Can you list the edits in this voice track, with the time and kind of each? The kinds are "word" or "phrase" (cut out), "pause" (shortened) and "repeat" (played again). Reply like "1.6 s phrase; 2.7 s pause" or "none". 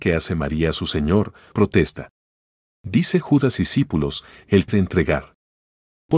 1.5 s word; 3.6 s phrase; 4.7 s phrase